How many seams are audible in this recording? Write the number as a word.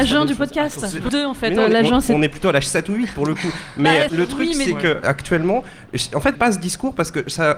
four